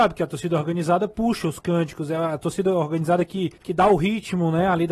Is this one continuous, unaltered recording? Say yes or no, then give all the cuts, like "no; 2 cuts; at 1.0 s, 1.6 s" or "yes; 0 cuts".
no; 1 cut; at 3.6 s